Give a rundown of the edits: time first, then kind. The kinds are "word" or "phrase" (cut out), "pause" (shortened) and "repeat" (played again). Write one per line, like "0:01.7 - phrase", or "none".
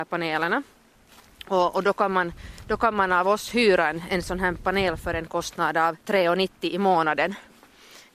0:06.0 - pause